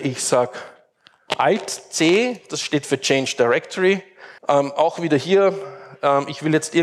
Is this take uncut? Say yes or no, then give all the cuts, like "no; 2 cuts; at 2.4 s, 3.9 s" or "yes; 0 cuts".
no; 1 cut; at 4.4 s